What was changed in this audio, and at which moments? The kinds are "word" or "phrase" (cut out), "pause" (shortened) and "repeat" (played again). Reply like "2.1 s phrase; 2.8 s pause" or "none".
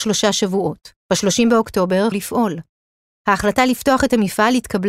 1.0 s pause; 2.1 s word